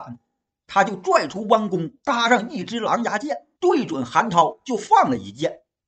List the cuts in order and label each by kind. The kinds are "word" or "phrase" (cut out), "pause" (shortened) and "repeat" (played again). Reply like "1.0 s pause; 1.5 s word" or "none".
2.0 s pause; 3.5 s pause